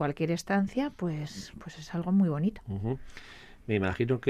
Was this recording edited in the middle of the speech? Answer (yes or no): no